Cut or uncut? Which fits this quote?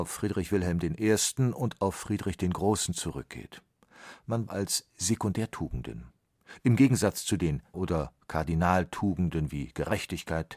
cut